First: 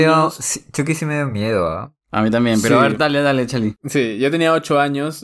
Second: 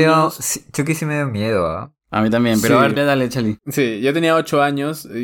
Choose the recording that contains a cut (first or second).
second